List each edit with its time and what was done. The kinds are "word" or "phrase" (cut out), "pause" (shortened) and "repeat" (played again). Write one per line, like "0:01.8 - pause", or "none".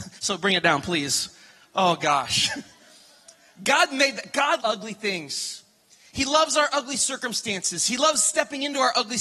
0:04.6 - word